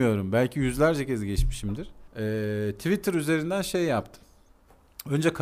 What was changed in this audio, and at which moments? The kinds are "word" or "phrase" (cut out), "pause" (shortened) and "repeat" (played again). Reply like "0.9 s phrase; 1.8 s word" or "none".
2.1 s pause